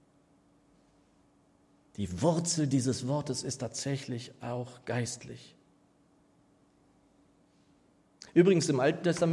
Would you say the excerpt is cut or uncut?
uncut